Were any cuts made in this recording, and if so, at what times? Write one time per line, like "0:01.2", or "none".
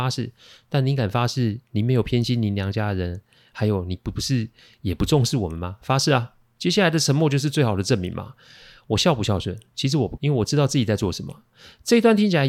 0:10.2